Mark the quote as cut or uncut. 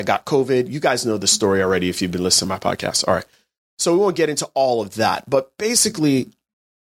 uncut